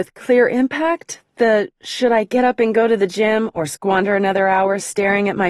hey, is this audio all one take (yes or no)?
yes